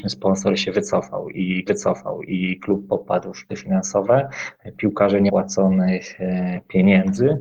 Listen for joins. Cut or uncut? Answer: cut